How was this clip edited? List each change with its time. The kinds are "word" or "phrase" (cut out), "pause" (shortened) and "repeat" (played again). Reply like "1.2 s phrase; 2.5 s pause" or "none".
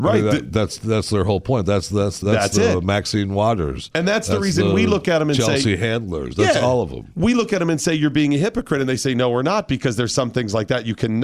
2.2 s word